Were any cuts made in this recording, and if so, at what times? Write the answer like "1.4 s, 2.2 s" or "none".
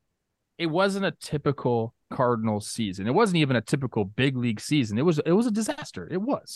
2.0 s